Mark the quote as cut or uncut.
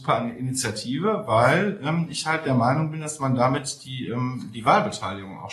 uncut